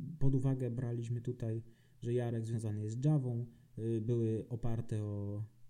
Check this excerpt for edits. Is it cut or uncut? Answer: uncut